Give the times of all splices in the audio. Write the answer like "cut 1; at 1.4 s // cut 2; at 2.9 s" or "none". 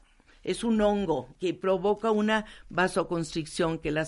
cut 1; at 1.3 s